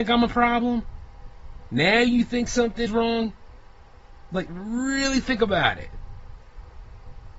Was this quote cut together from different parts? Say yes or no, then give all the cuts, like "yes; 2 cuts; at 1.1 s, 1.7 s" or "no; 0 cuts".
yes; 2 cuts; at 2.9 s, 4.5 s